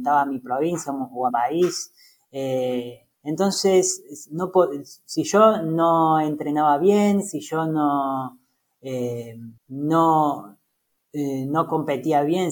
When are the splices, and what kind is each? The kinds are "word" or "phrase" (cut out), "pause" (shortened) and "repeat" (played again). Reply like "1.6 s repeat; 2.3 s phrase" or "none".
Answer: 1.3 s word; 3.1 s pause; 9.6 s pause